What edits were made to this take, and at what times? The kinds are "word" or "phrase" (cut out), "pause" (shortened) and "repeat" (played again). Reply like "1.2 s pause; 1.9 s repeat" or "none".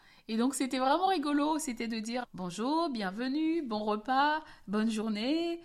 2.2 s word